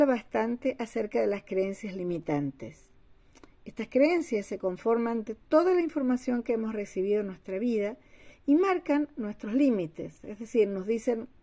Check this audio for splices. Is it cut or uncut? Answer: uncut